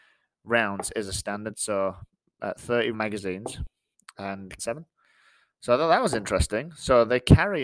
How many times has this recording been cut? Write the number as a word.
two